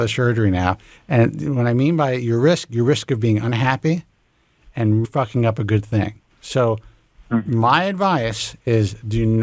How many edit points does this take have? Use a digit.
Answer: 2